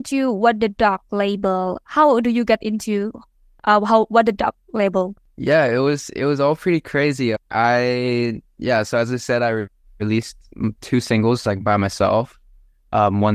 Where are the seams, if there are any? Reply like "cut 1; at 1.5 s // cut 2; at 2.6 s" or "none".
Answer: cut 1; at 7.4 s